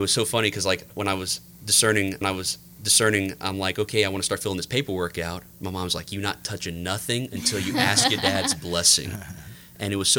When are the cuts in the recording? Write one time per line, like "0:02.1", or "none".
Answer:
0:02.2

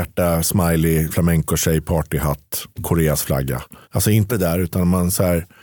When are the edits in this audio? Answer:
0:01.1
0:02.7
0:03.8
0:04.3

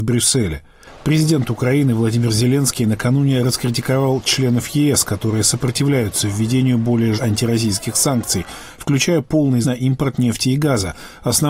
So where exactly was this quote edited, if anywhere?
0:07.2
0:09.6

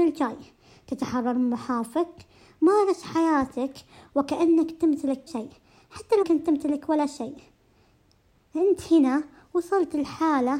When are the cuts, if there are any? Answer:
0:05.3
0:06.2

